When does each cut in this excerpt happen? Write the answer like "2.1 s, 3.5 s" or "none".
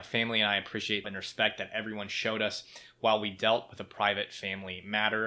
1.0 s